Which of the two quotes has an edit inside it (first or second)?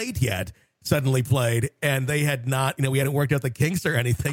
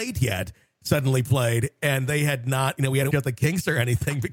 second